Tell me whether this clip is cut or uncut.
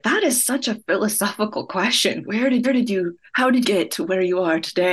cut